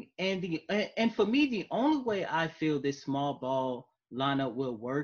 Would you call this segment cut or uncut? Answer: uncut